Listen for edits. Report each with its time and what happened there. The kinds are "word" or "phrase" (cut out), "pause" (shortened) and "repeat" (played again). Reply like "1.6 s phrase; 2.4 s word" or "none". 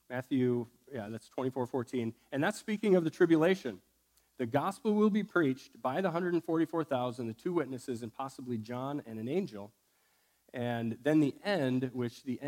none